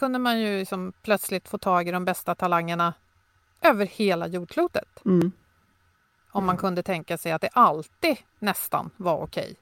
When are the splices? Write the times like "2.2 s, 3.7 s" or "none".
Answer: none